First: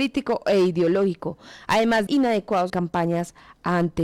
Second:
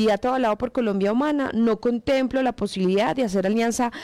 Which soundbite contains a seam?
first; 2 cuts; at 2.1 s, 2.7 s

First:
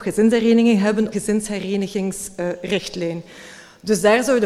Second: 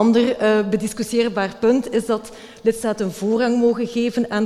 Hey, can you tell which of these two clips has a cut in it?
first; 1 cut; at 1.1 s

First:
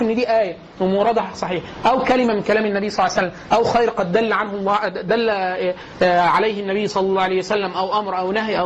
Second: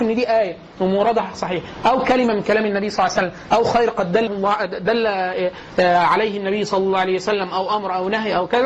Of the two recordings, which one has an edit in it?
second; 1 cut; at 4.3 s

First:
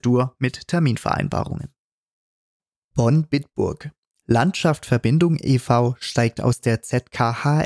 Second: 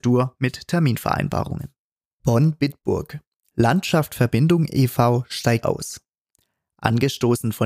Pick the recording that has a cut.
second; 2 cuts; at 2.0 s, 5.6 s

